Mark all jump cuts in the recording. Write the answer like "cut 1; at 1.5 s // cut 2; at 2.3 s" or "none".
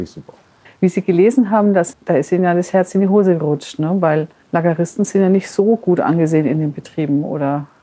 cut 1; at 1.9 s // cut 2; at 4.4 s